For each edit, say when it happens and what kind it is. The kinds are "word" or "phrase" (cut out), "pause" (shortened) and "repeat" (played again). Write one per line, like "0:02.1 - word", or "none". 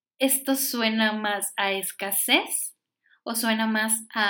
none